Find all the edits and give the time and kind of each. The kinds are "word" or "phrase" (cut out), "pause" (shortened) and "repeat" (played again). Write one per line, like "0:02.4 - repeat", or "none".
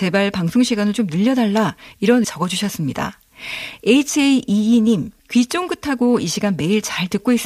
0:02.2 - phrase
0:05.2 - pause